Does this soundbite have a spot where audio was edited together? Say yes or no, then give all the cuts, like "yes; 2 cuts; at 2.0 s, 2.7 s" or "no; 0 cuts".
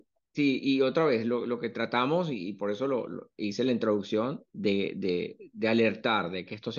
no; 0 cuts